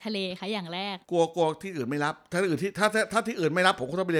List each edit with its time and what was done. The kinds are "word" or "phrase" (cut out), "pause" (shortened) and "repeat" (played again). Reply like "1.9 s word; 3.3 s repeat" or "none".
1.0 s pause